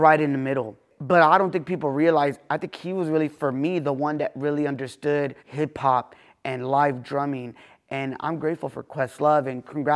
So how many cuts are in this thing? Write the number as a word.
one